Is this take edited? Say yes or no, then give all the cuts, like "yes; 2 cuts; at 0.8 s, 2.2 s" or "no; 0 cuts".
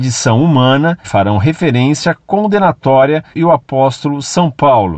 yes; 2 cuts; at 1.0 s, 3.3 s